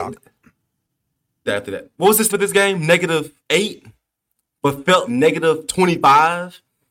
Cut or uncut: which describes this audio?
cut